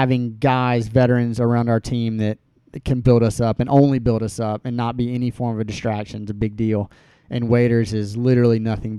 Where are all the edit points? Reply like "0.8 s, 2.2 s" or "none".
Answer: none